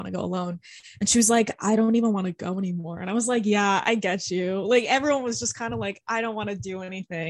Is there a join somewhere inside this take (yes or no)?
no